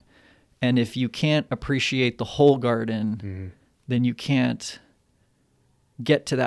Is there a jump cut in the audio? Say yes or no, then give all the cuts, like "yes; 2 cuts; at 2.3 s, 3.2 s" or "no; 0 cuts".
no; 0 cuts